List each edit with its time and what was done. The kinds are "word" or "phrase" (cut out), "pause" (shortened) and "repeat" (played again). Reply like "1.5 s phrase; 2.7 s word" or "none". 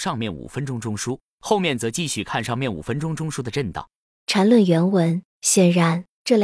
5.3 s pause